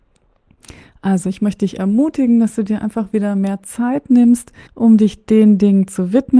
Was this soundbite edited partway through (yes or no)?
yes